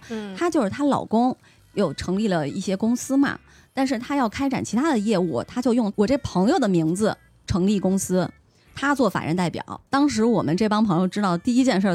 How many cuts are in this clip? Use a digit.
1